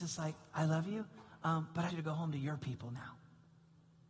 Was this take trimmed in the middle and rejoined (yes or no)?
yes